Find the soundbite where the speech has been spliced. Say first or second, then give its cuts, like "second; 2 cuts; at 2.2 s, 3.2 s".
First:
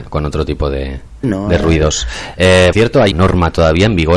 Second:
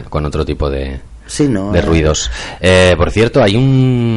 first; 3 cuts; at 1.2 s, 2.7 s, 3.1 s